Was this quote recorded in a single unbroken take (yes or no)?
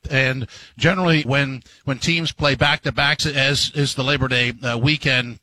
no